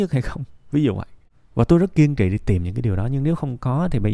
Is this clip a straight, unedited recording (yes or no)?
yes